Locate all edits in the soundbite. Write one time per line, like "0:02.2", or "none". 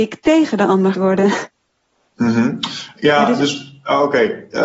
0:00.9